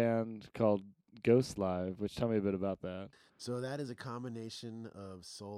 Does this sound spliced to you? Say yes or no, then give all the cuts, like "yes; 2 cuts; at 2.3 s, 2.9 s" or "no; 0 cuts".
no; 0 cuts